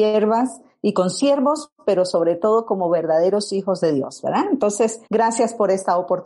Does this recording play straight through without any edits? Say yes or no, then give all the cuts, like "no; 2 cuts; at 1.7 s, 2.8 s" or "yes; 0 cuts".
no; 1 cut; at 5.1 s